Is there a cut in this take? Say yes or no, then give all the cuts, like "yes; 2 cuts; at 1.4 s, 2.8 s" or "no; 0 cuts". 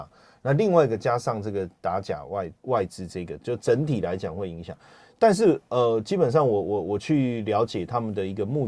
yes; 1 cut; at 2.6 s